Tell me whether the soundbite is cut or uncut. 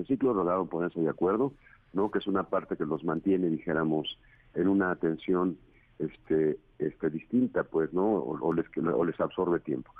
uncut